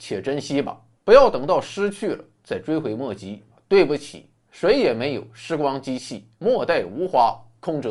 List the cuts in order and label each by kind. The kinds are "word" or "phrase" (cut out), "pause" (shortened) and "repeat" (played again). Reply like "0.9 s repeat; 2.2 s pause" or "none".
0.9 s pause; 3.5 s pause; 6.3 s pause